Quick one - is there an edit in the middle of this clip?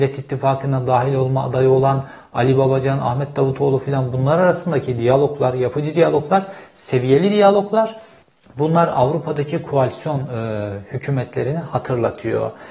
yes; 1 cut; at 8.2 s

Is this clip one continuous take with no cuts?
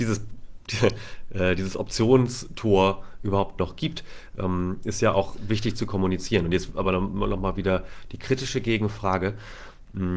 yes; 0 cuts

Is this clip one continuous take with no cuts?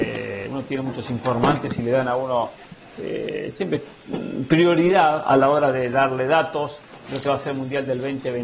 yes; 0 cuts

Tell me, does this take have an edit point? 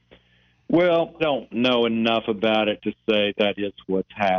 yes; 2 cuts; at 1.2 s, 3.3 s

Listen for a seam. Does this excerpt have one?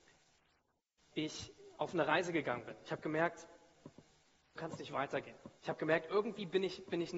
yes; 3 cuts; at 1.1 s, 4.6 s, 5.6 s

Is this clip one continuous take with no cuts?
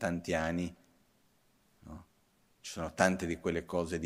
yes; 0 cuts

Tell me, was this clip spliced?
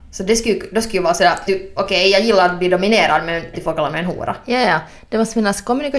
yes; 2 cuts; at 1.5 s, 3.5 s

